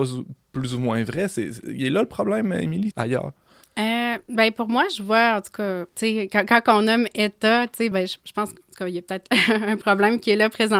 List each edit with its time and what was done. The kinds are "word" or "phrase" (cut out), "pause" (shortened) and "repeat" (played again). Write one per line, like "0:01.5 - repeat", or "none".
0:02.9 - phrase
0:05.9 - pause
0:07.9 - word